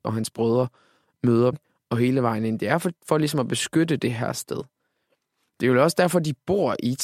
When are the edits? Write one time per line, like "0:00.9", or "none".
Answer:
0:01.5